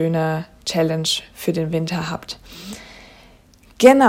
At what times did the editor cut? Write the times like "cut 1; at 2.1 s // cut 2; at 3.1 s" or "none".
none